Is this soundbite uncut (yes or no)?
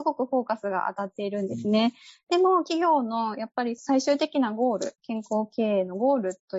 yes